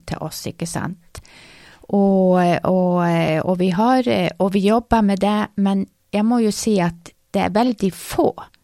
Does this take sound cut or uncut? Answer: uncut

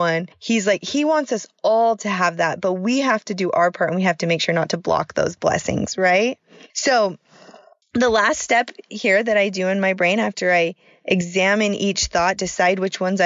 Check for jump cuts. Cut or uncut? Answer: uncut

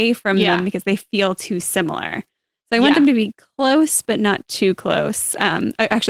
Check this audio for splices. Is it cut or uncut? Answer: uncut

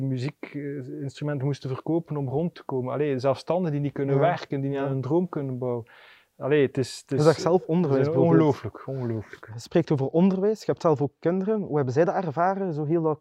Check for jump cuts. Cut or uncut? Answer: uncut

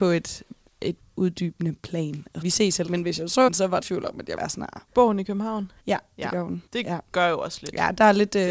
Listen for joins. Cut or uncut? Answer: cut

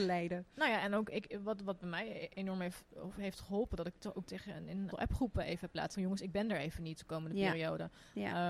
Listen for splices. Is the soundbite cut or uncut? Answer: cut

